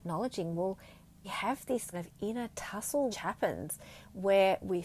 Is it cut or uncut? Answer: cut